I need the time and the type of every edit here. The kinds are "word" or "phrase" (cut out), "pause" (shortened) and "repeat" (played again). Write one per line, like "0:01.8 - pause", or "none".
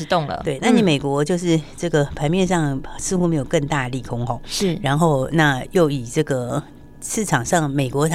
none